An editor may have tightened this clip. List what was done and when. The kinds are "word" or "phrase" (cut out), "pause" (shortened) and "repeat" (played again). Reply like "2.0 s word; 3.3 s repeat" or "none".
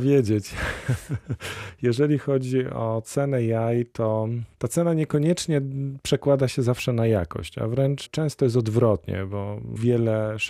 none